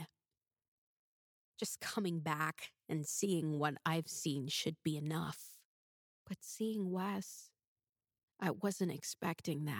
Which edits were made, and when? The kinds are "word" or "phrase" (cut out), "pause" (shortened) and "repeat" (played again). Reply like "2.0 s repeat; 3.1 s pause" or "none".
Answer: none